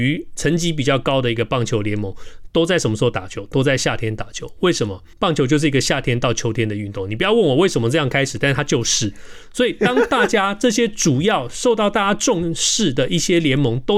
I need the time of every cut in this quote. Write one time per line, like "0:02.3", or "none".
0:05.1